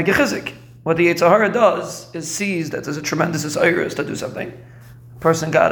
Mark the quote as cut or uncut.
uncut